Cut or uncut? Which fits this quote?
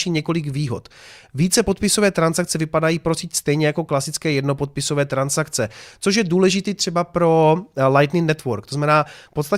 uncut